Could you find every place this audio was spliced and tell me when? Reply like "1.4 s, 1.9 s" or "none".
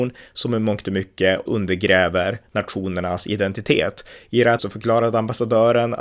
1.5 s, 4.6 s